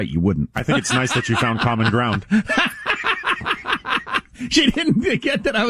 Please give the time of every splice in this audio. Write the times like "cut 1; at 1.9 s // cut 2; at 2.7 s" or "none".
none

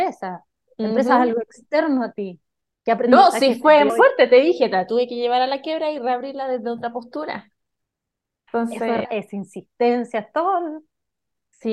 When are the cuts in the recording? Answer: cut 1; at 3.9 s // cut 2; at 9.0 s

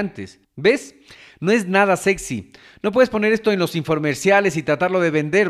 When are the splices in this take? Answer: none

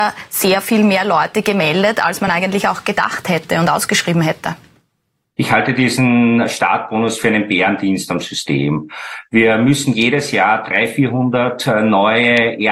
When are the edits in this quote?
none

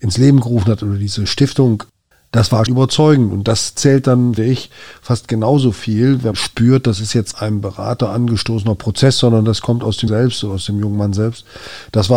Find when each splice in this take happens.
cut 1; at 2.1 s // cut 2; at 2.7 s // cut 3; at 4.4 s // cut 4; at 6.3 s // cut 5; at 7.3 s // cut 6; at 10.1 s

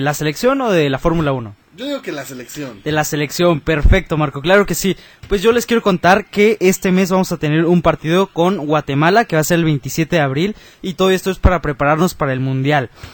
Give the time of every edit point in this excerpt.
none

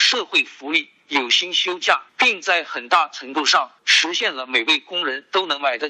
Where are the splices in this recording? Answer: cut 1; at 2.1 s // cut 2; at 3.8 s

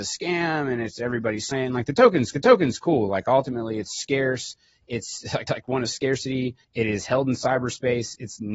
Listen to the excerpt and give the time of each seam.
cut 1; at 1.5 s // cut 2; at 2.3 s // cut 3; at 5.5 s // cut 4; at 5.9 s // cut 5; at 6.6 s

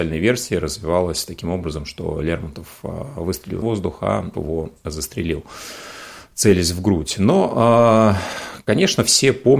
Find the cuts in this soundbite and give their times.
cut 1; at 3.6 s // cut 2; at 4.3 s

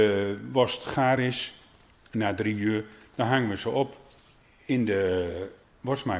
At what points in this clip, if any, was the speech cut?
none

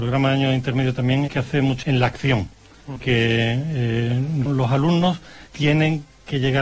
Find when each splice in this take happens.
cut 1; at 1.3 s // cut 2; at 1.8 s // cut 3; at 3.0 s // cut 4; at 4.5 s // cut 5; at 5.5 s

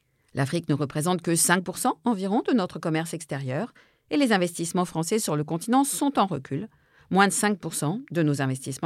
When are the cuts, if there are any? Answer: none

